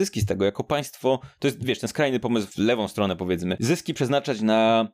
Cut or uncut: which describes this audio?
uncut